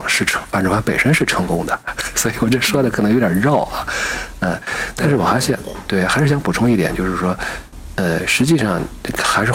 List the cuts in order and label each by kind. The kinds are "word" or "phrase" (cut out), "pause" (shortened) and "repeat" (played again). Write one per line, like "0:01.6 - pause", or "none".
none